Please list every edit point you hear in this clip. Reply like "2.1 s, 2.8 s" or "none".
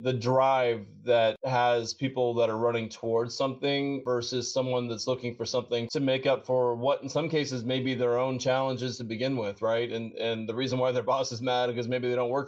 none